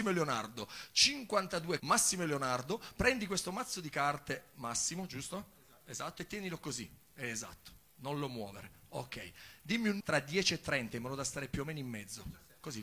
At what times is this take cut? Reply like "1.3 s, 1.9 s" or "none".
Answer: 1.8 s, 10.0 s